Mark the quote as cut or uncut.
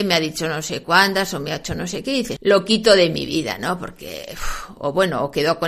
cut